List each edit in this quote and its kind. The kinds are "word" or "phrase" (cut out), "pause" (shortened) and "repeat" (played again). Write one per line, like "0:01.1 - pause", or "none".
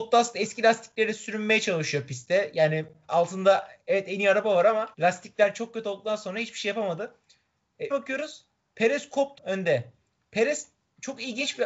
0:04.9 - pause
0:07.9 - phrase
0:09.4 - word